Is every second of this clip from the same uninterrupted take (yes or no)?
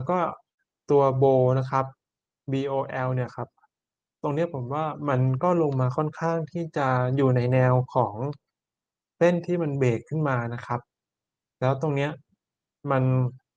yes